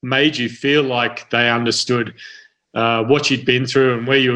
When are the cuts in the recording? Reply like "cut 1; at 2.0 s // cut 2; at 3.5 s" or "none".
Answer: none